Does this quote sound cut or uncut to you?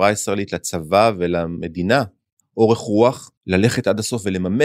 cut